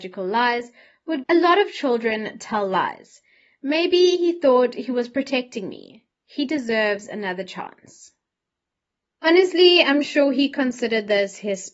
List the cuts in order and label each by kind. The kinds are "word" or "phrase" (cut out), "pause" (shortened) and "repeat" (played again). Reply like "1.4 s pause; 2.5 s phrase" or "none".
1.2 s phrase